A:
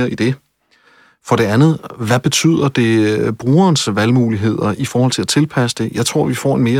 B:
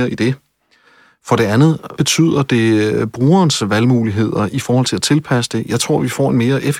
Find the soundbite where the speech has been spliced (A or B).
B